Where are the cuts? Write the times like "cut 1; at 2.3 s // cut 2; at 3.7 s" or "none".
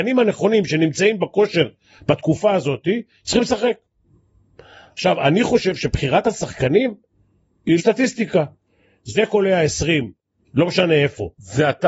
cut 1; at 7.8 s

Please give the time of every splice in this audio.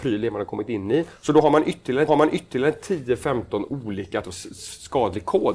cut 1; at 2.1 s // cut 2; at 4.2 s

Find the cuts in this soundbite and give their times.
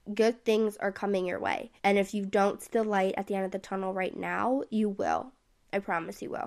cut 1; at 1.8 s

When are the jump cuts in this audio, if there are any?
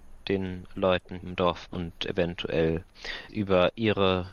cut 1; at 1.2 s // cut 2; at 1.7 s // cut 3; at 3.3 s

